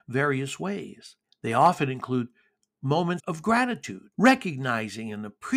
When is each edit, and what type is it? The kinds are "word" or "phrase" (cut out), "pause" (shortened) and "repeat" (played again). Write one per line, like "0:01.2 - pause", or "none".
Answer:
0:01.2 - pause
0:03.2 - word
0:04.1 - pause